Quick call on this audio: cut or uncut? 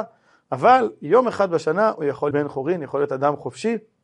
cut